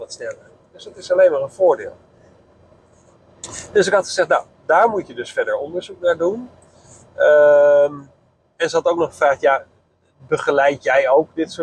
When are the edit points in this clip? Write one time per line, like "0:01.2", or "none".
none